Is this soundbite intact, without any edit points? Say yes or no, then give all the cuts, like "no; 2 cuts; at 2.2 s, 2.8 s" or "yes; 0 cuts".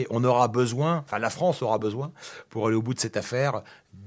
yes; 0 cuts